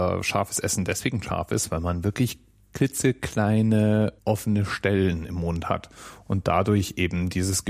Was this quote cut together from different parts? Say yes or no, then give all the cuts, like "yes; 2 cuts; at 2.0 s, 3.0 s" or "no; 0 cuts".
yes; 1 cut; at 4.2 s